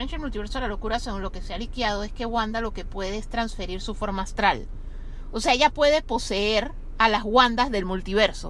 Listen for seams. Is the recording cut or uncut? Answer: uncut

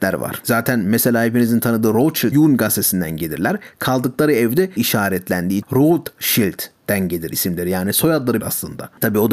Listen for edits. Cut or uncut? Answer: cut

